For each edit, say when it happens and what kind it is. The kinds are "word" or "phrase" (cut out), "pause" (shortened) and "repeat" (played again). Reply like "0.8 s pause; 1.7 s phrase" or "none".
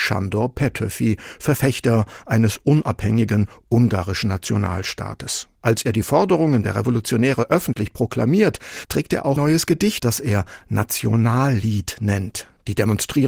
5.6 s pause; 9.4 s word; 10.0 s word